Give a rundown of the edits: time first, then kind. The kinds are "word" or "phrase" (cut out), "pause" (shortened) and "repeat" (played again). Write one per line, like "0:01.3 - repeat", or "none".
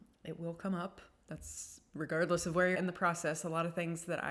0:02.7 - word